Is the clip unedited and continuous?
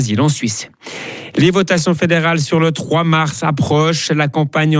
yes; 0 cuts

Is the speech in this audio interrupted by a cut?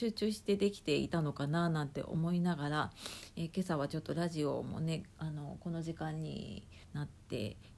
yes; 1 cut; at 6.8 s

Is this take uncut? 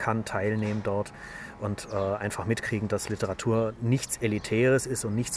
yes; 0 cuts

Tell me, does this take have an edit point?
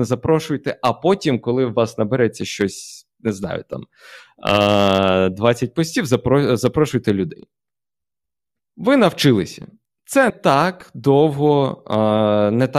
yes; 1 cut; at 10.3 s

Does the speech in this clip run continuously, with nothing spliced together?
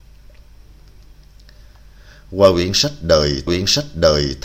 no; 1 cut; at 3.5 s

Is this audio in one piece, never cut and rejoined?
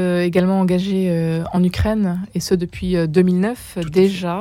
yes; 0 cuts

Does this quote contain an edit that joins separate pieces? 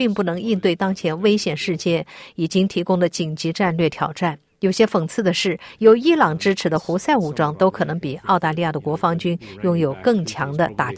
yes; 1 cut; at 4.5 s

